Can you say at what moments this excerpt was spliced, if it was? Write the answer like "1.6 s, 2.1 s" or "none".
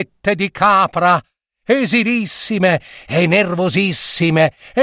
none